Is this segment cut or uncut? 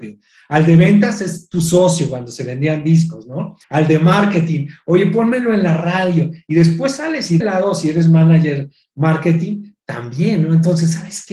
cut